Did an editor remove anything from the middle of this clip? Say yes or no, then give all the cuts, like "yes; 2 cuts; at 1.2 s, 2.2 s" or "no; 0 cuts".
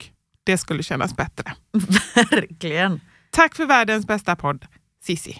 no; 0 cuts